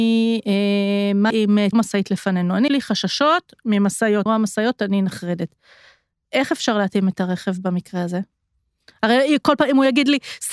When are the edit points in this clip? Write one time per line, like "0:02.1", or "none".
0:01.3
0:01.7
0:02.7
0:04.3